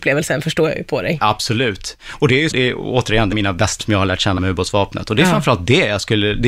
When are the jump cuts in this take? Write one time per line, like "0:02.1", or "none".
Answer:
0:02.5
0:03.3
0:03.8
0:04.4